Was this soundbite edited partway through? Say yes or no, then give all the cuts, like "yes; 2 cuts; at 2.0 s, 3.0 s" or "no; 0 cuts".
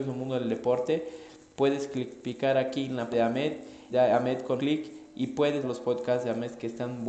yes; 4 cuts; at 3.1 s, 3.9 s, 4.6 s, 5.6 s